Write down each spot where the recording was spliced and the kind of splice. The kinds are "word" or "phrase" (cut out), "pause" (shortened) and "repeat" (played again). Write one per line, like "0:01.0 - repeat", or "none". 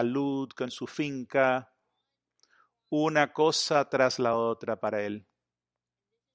none